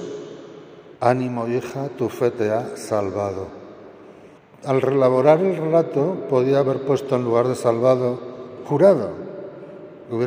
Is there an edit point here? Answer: yes; 2 cuts; at 1.0 s, 4.4 s

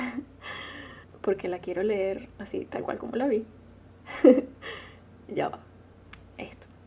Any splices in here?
no; 0 cuts

